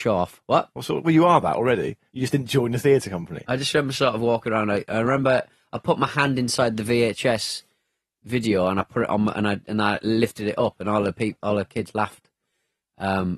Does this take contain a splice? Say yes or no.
no